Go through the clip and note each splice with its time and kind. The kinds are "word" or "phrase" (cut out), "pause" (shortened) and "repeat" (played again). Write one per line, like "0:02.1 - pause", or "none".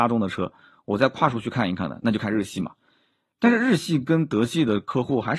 none